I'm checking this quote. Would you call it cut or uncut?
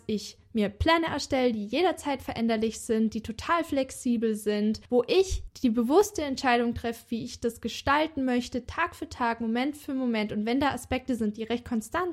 cut